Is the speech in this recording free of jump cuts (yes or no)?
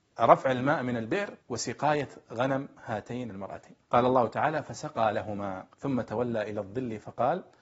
no